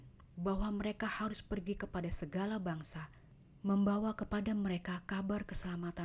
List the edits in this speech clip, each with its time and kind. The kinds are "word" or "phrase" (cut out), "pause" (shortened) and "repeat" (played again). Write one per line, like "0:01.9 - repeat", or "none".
none